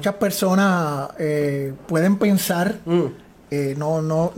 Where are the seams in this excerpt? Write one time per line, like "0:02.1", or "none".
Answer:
none